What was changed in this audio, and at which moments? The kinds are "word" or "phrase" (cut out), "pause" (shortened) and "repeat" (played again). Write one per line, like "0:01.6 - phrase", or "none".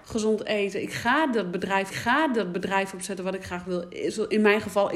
0:01.9 - repeat